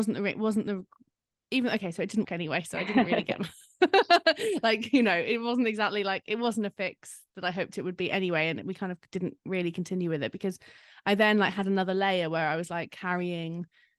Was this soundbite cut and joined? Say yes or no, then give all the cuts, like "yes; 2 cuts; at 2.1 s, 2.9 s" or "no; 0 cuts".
yes; 1 cut; at 2.2 s